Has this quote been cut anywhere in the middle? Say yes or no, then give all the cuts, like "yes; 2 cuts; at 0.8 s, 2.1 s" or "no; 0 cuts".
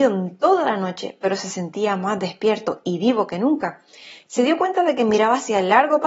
no; 0 cuts